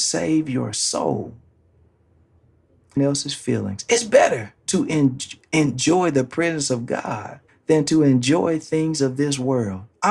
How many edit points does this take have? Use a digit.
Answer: 3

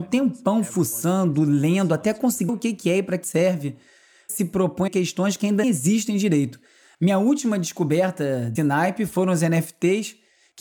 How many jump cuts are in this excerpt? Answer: 6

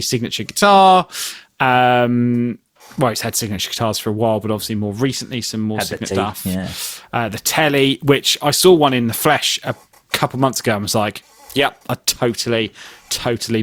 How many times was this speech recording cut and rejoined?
1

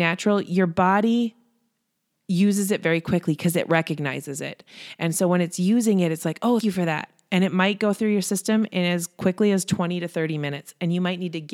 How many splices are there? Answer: 1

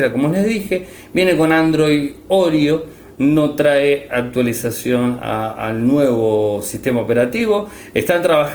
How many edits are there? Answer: 0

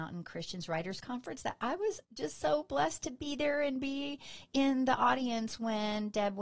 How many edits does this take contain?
1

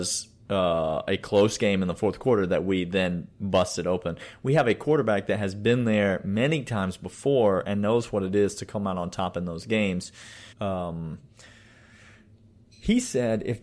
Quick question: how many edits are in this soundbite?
1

